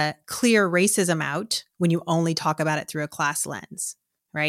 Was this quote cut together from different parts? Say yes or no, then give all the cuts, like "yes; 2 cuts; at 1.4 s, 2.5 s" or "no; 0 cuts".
no; 0 cuts